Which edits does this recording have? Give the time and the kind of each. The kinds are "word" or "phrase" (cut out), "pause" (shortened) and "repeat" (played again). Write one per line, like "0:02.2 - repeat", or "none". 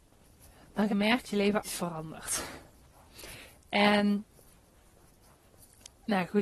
0:00.9 - word
0:01.2 - word
0:01.6 - word